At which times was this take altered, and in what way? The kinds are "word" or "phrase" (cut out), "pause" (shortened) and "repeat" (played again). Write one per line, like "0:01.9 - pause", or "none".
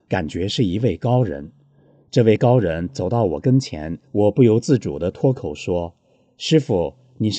0:04.0 - pause